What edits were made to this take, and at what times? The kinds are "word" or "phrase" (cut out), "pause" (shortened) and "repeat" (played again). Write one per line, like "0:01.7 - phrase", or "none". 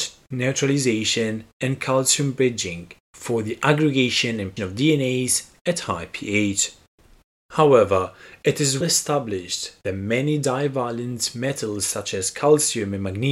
0:03.0 - pause
0:04.6 - word
0:08.8 - word